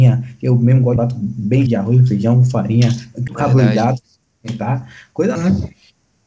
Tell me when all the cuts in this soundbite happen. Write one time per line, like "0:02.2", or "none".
0:01.0
0:01.7
0:03.3
0:05.4